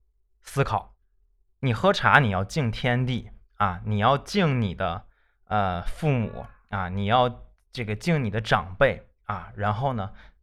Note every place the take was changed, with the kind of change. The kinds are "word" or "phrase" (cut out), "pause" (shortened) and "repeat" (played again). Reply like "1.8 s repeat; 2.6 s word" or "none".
none

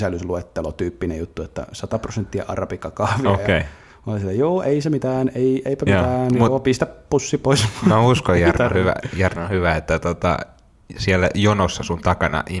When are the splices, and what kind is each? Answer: none

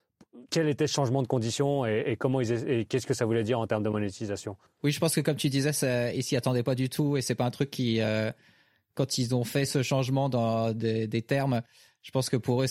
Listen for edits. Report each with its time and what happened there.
4.7 s pause

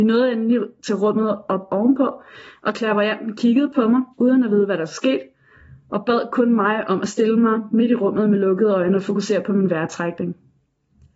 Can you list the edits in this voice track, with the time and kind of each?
4.1 s pause

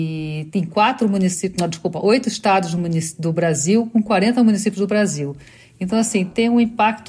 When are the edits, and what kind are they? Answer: none

